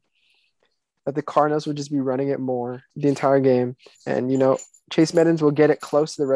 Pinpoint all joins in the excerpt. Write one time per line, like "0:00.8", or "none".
0:02.9
0:03.9